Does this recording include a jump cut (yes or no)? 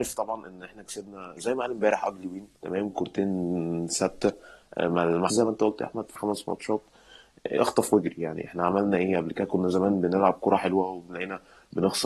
yes